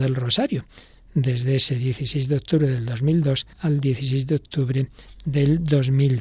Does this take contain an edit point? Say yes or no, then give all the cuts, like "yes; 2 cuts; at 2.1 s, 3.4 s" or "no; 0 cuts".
yes; 1 cut; at 3.5 s